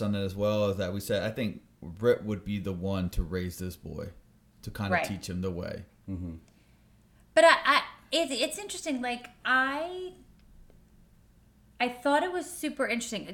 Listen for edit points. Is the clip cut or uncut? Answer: uncut